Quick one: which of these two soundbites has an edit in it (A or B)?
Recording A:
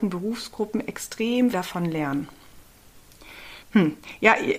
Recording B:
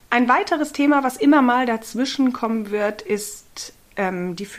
A